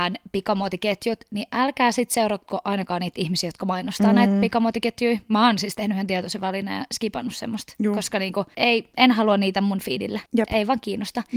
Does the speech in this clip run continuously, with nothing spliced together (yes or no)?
no